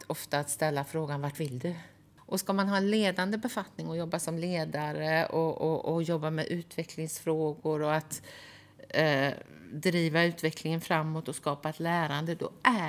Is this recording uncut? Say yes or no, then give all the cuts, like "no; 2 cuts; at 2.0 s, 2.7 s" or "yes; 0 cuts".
no; 1 cut; at 2.2 s